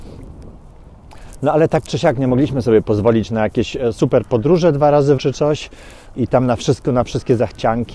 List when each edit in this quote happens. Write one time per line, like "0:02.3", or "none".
0:05.2
0:06.1

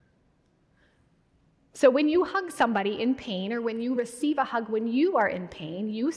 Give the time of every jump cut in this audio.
none

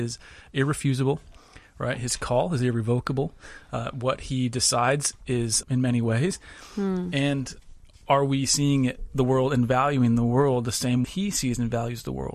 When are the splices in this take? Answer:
0:05.6
0:07.9
0:11.0

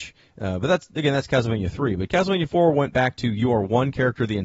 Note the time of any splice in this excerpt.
none

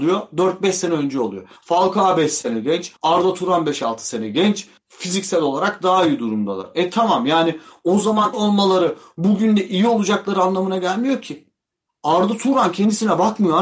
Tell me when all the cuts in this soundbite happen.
0:01.6
0:03.0
0:04.8
0:08.3

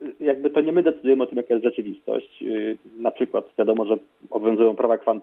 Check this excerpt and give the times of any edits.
0:03.5

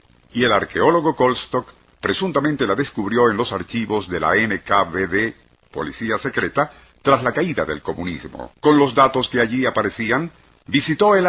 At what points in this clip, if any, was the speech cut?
0:08.5

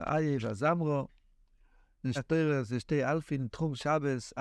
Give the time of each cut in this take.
0:02.2

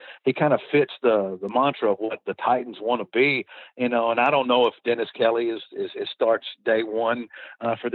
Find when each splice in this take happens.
none

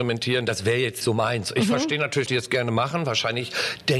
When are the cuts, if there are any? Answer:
0:01.0
0:02.3

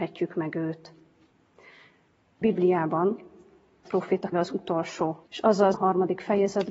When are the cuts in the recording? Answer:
0:02.4
0:03.8
0:04.3
0:05.3
0:05.7

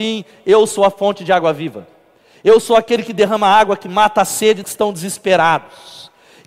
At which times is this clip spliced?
0:04.6

